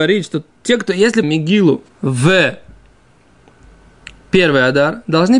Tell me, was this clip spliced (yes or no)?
yes